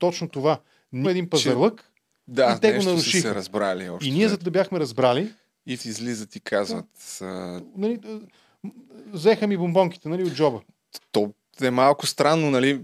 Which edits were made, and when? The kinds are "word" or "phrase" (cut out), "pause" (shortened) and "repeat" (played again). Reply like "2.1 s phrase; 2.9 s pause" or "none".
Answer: 1.0 s word; 4.4 s phrase; 5.8 s phrase